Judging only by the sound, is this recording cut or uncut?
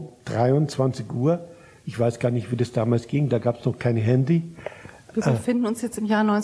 uncut